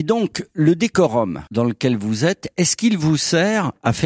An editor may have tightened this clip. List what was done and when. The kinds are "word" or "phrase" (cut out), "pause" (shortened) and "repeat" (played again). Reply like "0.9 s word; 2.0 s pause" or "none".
1.5 s pause